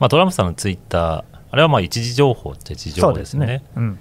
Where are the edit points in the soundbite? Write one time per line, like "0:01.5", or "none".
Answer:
0:01.5